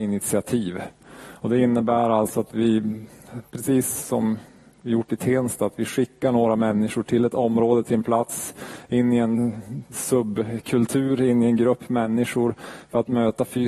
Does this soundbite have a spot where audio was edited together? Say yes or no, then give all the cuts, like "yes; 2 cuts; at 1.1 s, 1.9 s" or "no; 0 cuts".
no; 0 cuts